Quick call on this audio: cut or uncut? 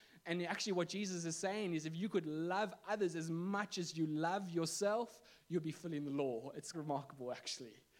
cut